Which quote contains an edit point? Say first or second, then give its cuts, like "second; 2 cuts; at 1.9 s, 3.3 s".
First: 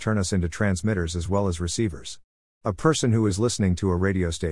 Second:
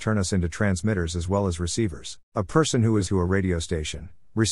second; 2 cuts; at 2.2 s, 3.1 s